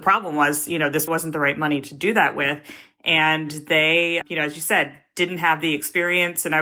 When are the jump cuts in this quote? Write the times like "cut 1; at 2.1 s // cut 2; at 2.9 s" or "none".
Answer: cut 1; at 1.1 s // cut 2; at 4.2 s